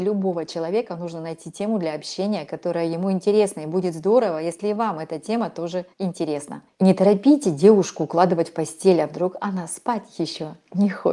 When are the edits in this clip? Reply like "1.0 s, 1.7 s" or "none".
5.9 s